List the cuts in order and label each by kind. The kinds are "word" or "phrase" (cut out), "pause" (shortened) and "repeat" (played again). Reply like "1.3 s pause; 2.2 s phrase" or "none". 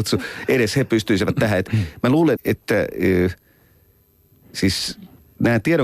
2.4 s word